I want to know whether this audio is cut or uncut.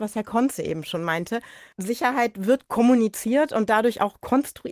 uncut